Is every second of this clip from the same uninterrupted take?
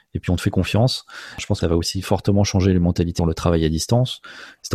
no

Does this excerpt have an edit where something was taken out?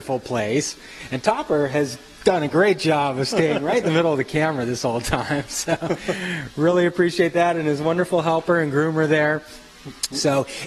no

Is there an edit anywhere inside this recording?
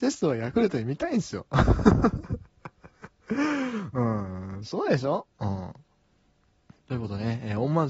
no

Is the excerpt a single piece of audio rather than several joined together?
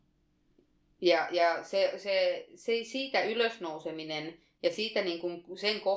yes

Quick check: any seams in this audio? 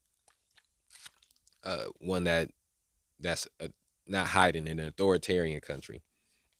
no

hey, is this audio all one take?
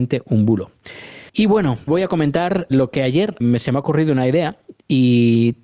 no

